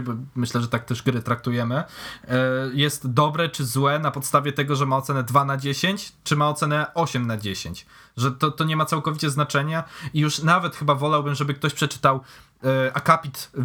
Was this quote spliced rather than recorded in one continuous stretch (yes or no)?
no